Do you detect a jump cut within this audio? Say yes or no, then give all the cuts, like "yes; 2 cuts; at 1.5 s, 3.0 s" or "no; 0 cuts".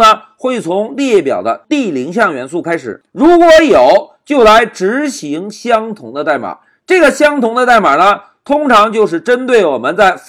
no; 0 cuts